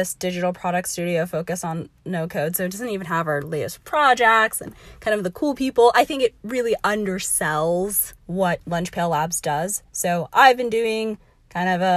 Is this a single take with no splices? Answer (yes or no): no